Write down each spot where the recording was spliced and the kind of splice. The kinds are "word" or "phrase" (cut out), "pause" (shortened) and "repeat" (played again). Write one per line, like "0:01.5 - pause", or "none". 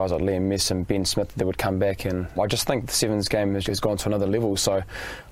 0:02.4 - word
0:03.6 - word